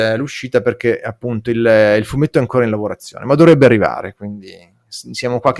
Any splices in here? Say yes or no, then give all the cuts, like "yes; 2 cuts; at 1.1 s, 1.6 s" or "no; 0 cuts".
no; 0 cuts